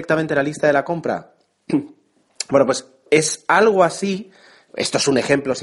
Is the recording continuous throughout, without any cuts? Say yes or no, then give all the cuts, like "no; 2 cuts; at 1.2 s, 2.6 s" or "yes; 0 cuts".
yes; 0 cuts